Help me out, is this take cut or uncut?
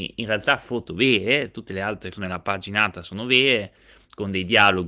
cut